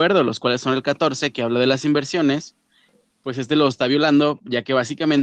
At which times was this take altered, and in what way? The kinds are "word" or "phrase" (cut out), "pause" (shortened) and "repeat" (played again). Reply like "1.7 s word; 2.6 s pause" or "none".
none